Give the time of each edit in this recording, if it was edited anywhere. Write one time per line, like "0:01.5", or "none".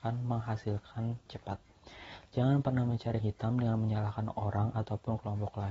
0:01.3
0:03.2